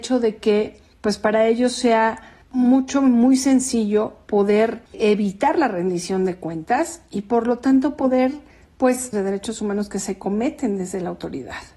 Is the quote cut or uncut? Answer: cut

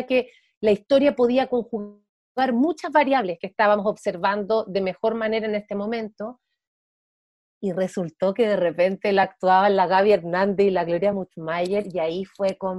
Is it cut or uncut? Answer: uncut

